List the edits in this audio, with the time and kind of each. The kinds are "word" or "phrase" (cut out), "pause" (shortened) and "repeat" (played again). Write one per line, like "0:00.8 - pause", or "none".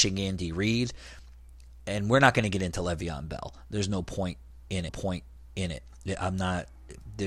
0:04.9 - repeat